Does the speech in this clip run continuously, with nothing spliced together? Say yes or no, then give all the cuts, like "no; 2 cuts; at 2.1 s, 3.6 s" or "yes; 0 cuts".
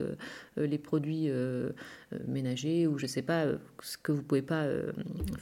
yes; 0 cuts